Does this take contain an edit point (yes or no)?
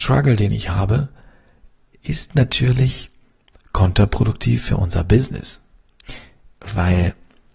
no